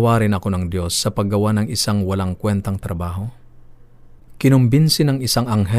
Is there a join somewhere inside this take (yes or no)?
no